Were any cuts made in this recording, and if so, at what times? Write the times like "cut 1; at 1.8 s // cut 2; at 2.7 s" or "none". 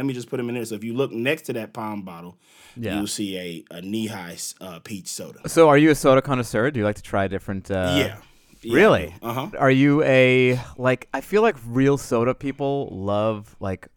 none